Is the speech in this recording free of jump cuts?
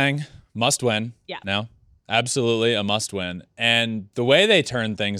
yes; 0 cuts

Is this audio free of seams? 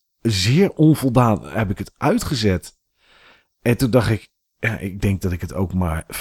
yes; 0 cuts

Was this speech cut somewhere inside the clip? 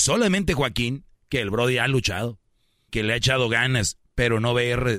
yes; 2 cuts; at 1.2 s, 2.9 s

